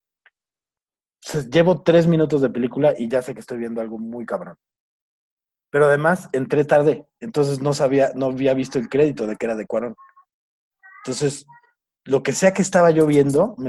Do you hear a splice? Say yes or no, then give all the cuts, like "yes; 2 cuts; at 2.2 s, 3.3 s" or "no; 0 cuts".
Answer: no; 0 cuts